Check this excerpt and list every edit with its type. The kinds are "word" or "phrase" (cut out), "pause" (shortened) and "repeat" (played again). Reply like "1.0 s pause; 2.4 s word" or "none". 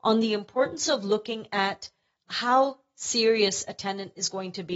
none